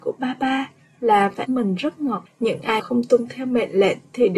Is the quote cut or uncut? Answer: cut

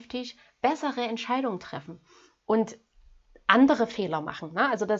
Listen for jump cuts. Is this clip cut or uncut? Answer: uncut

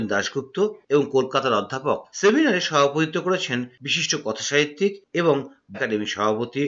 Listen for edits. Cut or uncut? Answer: cut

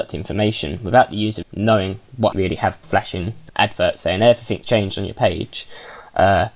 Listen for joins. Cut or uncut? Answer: cut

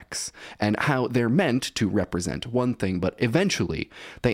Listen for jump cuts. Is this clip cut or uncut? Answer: uncut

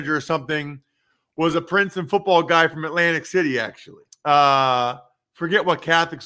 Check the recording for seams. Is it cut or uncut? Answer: cut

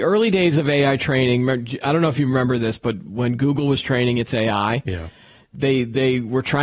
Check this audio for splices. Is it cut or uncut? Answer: uncut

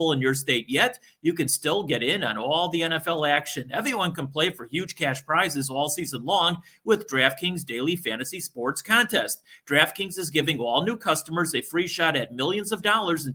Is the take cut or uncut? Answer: uncut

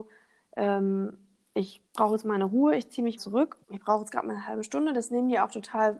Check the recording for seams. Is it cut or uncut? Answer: cut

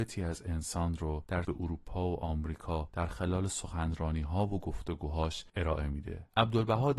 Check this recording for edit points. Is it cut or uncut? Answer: cut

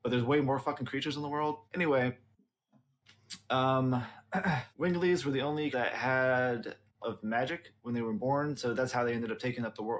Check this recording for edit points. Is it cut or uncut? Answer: cut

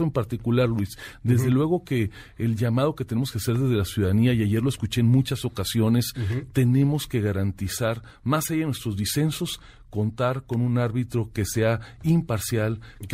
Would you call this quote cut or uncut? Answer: uncut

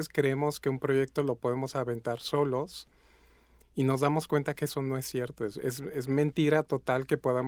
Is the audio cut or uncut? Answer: uncut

